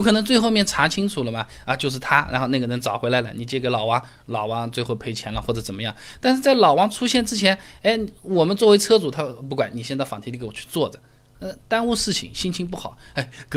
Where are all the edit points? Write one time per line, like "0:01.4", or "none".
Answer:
none